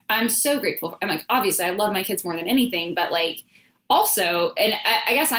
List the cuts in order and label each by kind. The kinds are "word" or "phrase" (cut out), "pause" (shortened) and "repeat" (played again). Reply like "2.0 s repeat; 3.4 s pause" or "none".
none